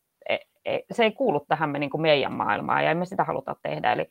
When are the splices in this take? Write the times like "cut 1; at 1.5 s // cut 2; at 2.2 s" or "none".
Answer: none